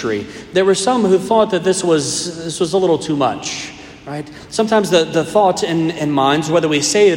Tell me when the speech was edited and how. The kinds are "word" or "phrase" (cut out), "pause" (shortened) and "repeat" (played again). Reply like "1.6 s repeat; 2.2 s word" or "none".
none